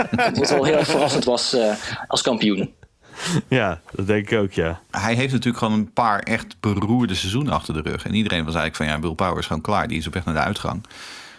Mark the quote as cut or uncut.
uncut